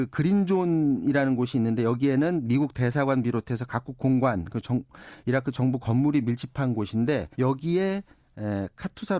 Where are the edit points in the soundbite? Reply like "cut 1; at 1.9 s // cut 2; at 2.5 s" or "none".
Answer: cut 1; at 7.3 s